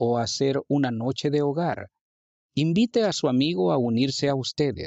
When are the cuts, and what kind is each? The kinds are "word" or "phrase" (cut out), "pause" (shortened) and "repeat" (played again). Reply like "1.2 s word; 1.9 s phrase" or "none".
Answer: none